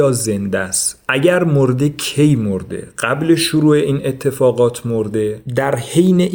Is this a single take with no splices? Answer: yes; 0 cuts

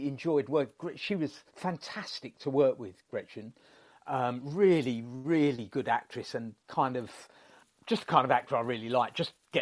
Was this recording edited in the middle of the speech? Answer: yes; 1 cut; at 1.5 s

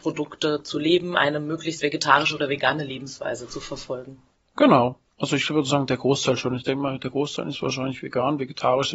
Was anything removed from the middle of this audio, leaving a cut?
yes; 1 cut; at 8.0 s

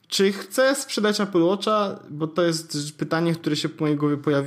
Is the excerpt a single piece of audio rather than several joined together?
yes; 0 cuts

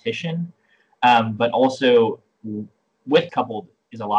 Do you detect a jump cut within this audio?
yes; 1 cut; at 3.3 s

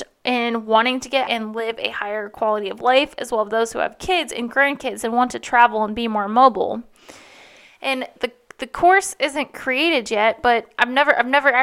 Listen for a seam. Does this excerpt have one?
yes; 2 cuts; at 1.3 s, 8.2 s

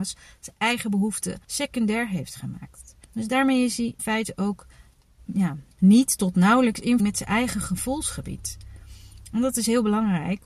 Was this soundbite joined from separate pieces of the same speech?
yes; 5 cuts; at 1.4 s, 3.0 s, 4.0 s, 5.7 s, 7.0 s

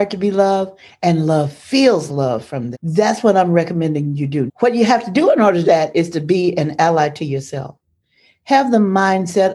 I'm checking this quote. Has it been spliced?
yes; 4 cuts; at 2.1 s, 2.7 s, 4.5 s, 5.6 s

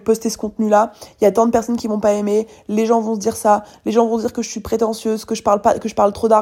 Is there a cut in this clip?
no; 0 cuts

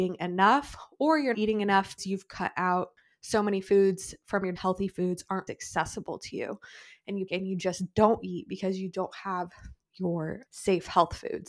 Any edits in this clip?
yes; 7 cuts; at 1.3 s, 2.0 s, 3.0 s, 4.5 s, 5.5 s, 7.3 s, 10.5 s

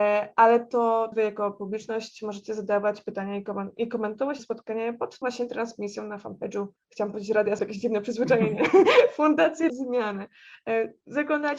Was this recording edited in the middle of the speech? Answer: yes; 6 cuts; at 1.1 s, 4.4 s, 5.2 s, 6.8 s, 7.6 s, 9.7 s

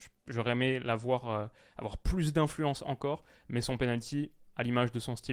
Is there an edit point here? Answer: no; 0 cuts

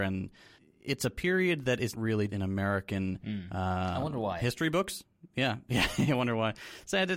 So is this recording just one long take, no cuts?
no; 2 cuts; at 1.9 s, 2.3 s

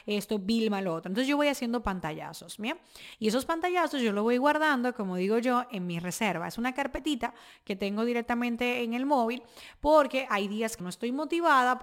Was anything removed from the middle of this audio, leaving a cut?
yes; 1 cut; at 10.8 s

